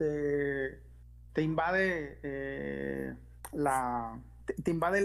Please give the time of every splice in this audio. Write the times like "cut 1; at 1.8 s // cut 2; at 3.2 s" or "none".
none